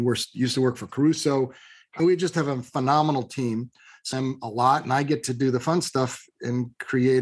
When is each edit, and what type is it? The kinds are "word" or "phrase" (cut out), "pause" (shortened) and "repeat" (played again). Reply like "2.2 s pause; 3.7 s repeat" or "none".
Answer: 2.0 s word; 4.1 s phrase